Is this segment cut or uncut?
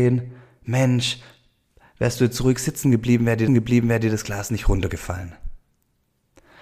cut